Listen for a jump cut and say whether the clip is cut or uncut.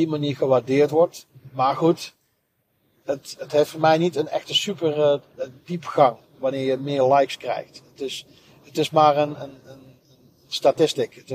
cut